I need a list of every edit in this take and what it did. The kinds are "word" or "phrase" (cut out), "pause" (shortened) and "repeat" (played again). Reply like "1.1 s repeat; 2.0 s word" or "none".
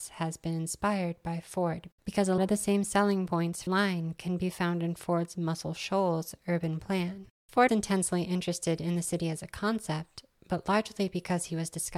2.4 s word; 3.7 s word; 7.7 s word